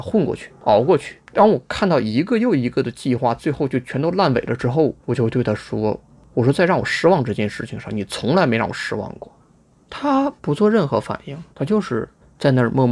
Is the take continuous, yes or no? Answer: no